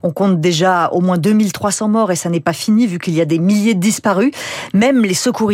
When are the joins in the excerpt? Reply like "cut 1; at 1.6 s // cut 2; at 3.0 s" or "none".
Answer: none